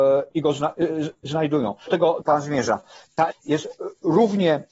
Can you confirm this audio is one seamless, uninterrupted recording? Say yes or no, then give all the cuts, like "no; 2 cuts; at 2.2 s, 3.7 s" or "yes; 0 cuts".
no; 3 cuts; at 1.9 s, 2.2 s, 3.3 s